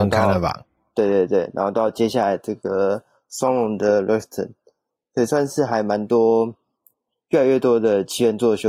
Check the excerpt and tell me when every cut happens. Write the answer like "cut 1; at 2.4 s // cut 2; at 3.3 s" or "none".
none